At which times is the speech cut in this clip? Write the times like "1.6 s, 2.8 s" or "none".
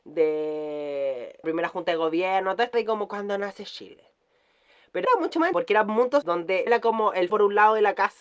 1.4 s, 2.7 s, 5.0 s, 5.5 s, 6.2 s, 6.7 s, 7.3 s